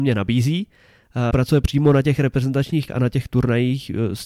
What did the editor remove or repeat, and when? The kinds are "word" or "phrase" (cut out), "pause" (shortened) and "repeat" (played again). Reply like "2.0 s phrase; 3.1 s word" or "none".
1.3 s phrase; 1.6 s word; 2.9 s word